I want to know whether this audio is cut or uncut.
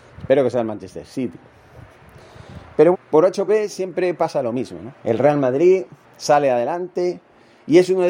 cut